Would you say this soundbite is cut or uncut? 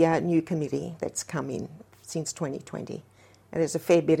uncut